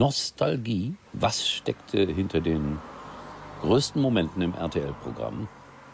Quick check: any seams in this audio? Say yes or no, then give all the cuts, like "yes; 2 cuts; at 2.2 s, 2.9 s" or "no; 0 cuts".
yes; 1 cut; at 1.1 s